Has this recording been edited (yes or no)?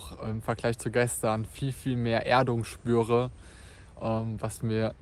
no